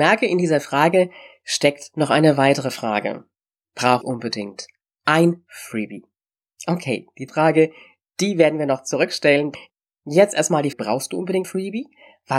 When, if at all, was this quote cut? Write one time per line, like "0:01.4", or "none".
0:04.0
0:07.3
0:10.7
0:11.4